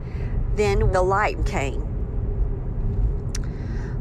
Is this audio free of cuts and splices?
no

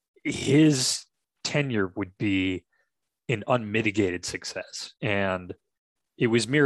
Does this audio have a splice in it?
yes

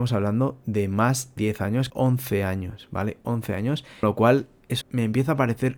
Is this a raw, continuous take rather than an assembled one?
no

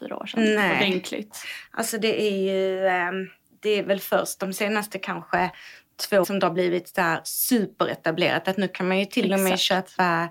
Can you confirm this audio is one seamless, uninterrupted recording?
no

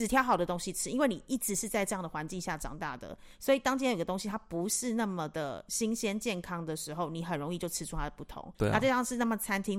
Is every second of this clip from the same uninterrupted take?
no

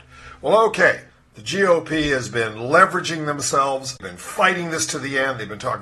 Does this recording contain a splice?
no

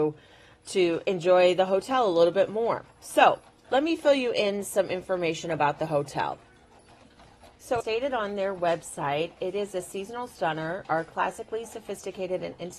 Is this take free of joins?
no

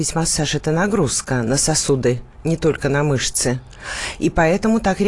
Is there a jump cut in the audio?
no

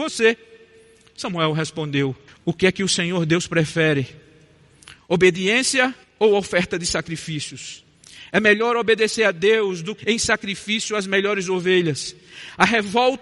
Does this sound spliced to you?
yes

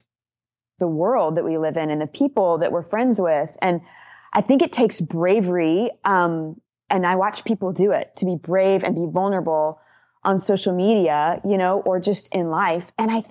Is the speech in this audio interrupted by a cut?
no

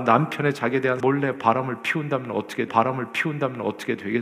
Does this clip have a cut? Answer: yes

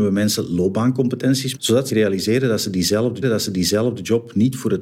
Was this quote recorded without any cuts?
no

